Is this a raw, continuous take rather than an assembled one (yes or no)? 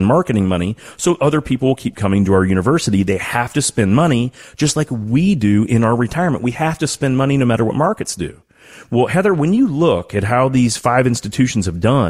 yes